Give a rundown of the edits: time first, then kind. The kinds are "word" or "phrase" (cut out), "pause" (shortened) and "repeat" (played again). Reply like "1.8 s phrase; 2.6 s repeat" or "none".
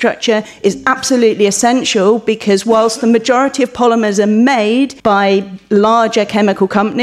5.0 s pause